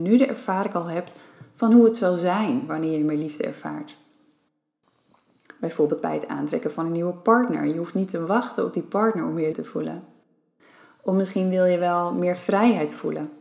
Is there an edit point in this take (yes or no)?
yes